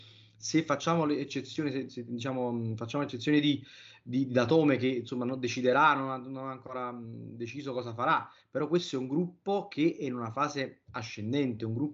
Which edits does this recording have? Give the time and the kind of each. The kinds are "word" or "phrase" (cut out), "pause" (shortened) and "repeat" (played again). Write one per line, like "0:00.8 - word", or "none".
none